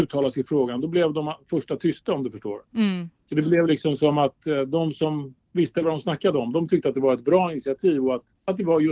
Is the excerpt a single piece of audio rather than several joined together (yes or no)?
yes